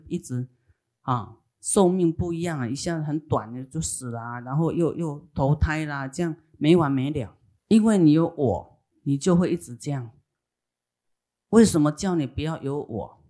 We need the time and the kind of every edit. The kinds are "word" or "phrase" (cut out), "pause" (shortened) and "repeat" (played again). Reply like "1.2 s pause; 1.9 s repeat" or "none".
7.6 s pause